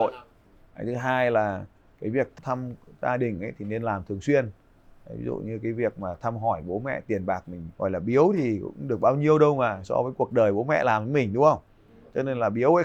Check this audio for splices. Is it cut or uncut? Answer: cut